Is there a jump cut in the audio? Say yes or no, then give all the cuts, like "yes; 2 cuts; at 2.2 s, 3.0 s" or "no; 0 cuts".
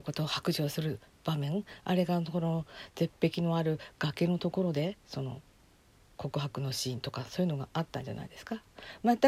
yes; 2 cuts; at 5.0 s, 5.6 s